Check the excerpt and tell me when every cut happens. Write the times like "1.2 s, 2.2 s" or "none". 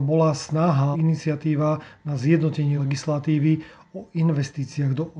0.9 s, 2.8 s